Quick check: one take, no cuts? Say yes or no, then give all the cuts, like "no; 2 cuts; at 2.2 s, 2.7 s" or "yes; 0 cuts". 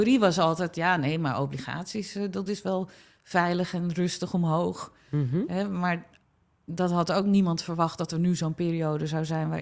yes; 0 cuts